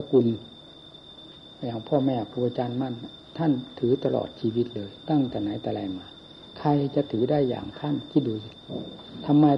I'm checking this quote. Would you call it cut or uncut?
uncut